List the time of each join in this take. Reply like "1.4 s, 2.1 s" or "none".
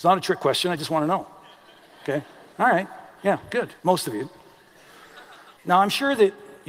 2.5 s, 3.8 s, 5.5 s